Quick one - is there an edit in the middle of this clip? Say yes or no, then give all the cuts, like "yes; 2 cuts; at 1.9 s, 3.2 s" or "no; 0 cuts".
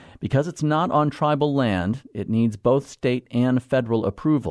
no; 0 cuts